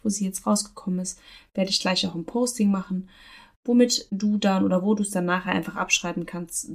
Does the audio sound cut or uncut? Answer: uncut